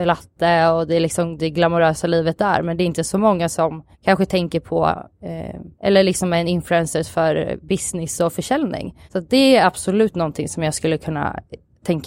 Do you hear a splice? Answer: yes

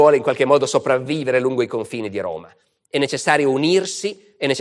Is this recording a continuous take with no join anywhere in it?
yes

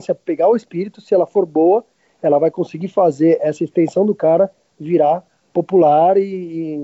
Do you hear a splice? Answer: no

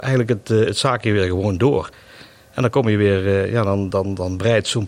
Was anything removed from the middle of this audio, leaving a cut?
no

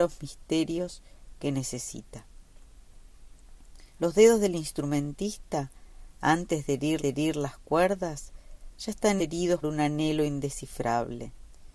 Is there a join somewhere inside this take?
yes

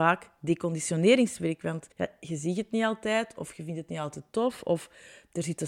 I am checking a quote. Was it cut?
yes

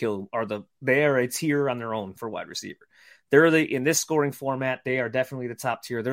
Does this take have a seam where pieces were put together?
no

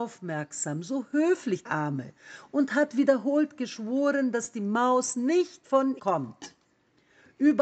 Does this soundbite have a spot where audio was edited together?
yes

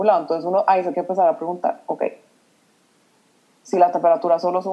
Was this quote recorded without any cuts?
no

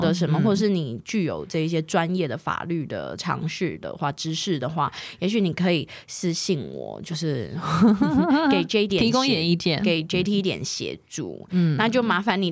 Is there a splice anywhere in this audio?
yes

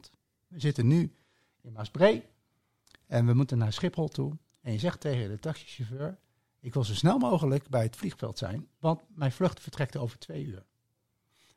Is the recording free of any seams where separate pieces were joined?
yes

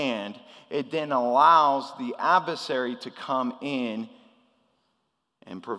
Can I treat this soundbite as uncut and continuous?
yes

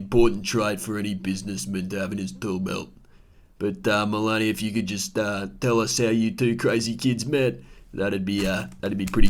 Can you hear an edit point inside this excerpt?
no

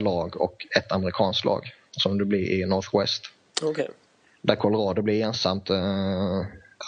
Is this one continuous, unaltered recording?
yes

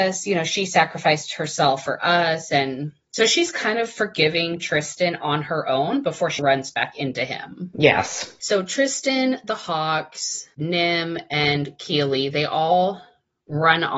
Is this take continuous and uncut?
no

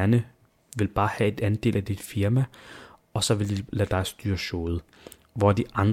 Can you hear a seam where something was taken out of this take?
no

